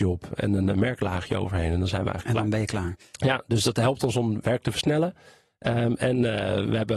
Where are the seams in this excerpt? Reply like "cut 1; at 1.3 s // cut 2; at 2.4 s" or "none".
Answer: none